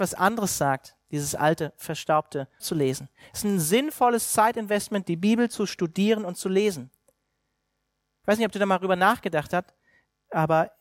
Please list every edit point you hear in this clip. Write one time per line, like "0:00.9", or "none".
0:02.6